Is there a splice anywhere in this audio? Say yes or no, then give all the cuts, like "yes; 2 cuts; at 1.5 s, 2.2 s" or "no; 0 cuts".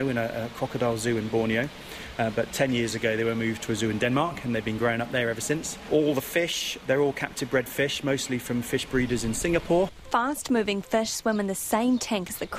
no; 0 cuts